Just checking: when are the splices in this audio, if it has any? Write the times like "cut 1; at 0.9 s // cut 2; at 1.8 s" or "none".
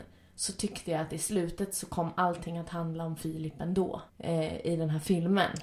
cut 1; at 4.1 s